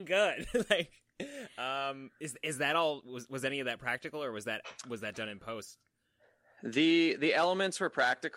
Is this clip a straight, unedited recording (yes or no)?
yes